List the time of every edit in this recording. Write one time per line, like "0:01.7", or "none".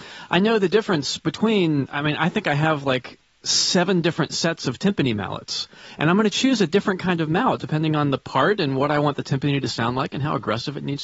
none